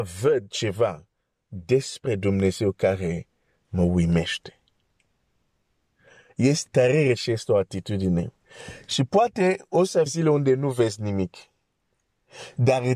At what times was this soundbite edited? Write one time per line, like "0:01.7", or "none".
0:06.7
0:10.1